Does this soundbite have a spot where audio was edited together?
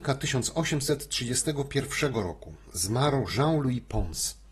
no; 0 cuts

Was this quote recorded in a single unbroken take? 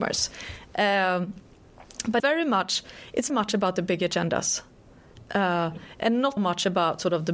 no; 3 cuts; at 2.2 s, 3.3 s, 6.4 s

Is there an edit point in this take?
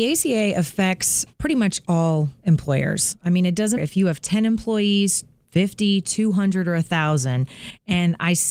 yes; 2 cuts; at 1.3 s, 3.8 s

